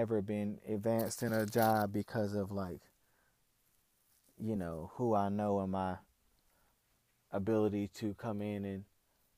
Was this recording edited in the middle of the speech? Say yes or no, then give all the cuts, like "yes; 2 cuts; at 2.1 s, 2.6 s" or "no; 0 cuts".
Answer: no; 0 cuts